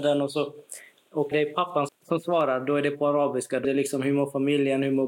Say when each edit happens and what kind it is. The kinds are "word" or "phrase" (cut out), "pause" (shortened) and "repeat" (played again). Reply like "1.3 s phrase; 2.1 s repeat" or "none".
1.3 s word; 1.9 s word; 3.6 s word

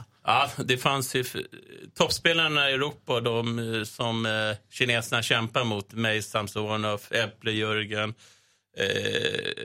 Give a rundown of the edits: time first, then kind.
none

